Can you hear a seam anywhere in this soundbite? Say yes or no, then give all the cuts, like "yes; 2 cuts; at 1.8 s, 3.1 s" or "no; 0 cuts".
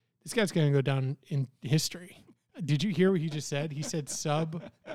no; 0 cuts